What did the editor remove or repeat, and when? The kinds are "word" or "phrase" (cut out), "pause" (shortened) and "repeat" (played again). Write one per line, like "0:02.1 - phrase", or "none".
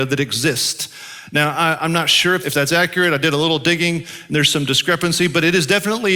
0:02.4 - word